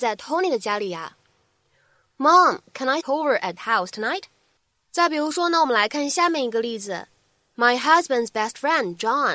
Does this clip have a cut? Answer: yes; 2 cuts; at 3.0 s, 3.6 s

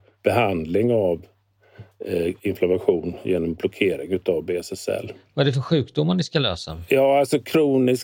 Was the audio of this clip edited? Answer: no; 0 cuts

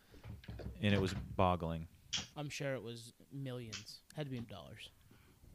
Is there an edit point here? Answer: yes; 4 cuts; at 1.4 s, 2.3 s, 4.1 s, 4.4 s

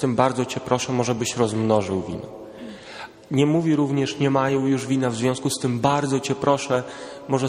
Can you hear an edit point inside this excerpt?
no; 0 cuts

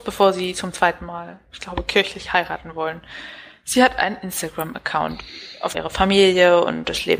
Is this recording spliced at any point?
yes; 1 cut; at 5.7 s

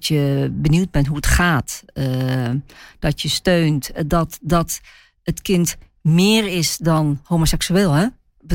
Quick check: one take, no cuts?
yes; 0 cuts

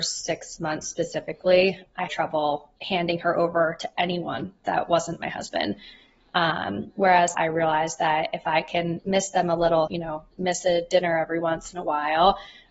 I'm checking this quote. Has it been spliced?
yes; 4 cuts; at 2.1 s, 2.8 s, 7.3 s, 9.9 s

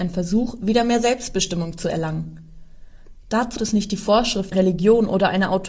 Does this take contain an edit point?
yes; 2 cuts; at 3.6 s, 4.5 s

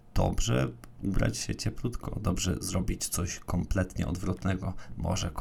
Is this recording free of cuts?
yes; 0 cuts

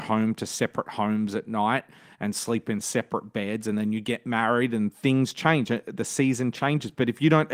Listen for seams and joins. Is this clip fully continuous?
yes; 0 cuts

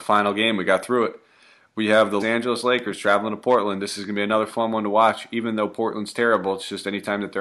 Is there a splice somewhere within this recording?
yes; 1 cut; at 2.2 s

